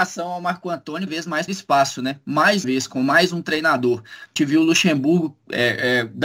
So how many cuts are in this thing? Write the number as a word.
four